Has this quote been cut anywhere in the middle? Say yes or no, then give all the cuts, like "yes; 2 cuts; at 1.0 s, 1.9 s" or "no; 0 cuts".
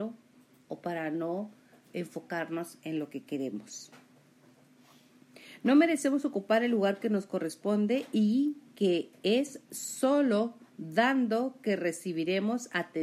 no; 0 cuts